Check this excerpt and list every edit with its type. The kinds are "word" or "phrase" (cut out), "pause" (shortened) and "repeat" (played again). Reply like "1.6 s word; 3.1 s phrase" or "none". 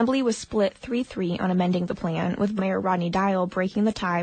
2.6 s word